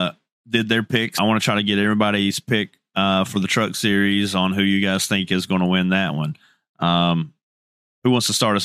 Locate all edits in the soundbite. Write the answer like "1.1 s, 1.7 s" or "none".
1.2 s